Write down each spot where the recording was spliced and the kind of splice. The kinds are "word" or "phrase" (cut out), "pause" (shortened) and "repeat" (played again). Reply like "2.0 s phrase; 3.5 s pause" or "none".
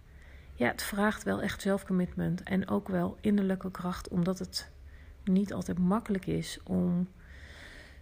none